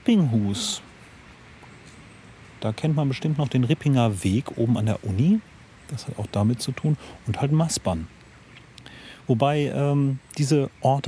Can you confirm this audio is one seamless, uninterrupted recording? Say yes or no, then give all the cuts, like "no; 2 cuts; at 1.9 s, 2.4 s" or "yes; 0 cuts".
yes; 0 cuts